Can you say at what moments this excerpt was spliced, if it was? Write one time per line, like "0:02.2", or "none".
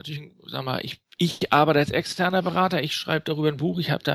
none